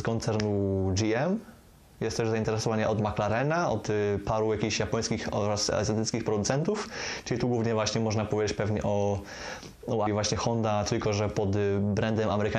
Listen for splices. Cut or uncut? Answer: cut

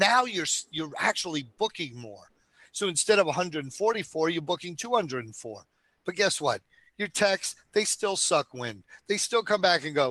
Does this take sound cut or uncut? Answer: uncut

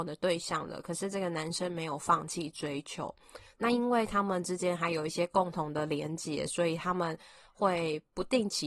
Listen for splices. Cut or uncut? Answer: uncut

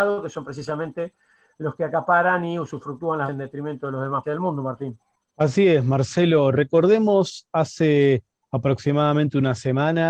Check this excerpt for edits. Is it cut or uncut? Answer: cut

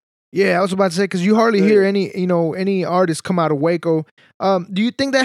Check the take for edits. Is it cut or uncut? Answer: uncut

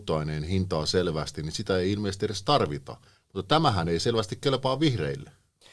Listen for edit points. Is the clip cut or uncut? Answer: uncut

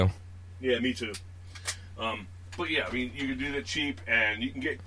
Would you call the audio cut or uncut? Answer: uncut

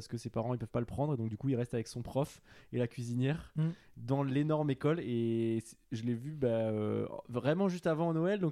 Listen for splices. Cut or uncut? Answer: uncut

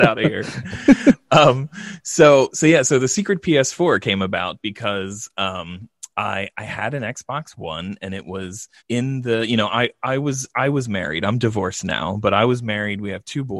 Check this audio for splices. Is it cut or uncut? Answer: cut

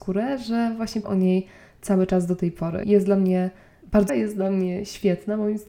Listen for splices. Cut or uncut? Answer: cut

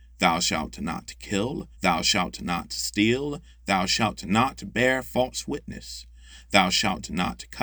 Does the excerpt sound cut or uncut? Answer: cut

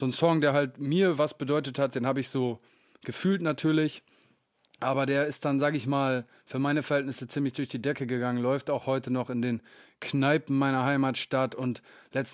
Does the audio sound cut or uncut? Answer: uncut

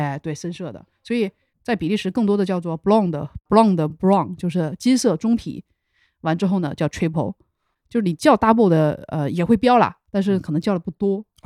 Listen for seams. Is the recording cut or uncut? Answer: uncut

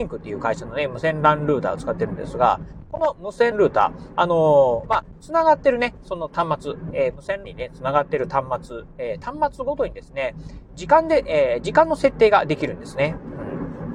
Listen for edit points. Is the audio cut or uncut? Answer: cut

